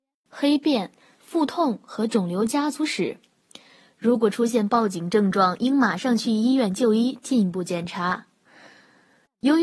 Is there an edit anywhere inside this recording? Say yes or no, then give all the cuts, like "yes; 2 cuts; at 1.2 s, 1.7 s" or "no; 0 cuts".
no; 0 cuts